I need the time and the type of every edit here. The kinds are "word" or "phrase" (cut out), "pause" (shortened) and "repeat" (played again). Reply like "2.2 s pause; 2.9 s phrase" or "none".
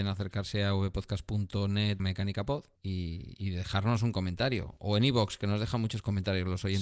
2.0 s word; 2.8 s pause